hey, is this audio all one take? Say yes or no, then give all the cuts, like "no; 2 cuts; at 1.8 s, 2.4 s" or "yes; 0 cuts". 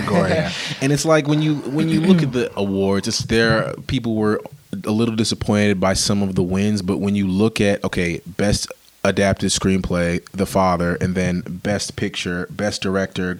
no; 1 cut; at 3.2 s